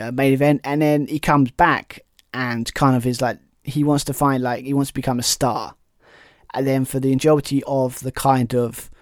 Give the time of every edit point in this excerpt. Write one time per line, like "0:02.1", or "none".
none